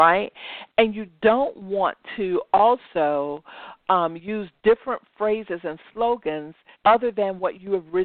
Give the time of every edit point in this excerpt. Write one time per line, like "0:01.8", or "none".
0:06.7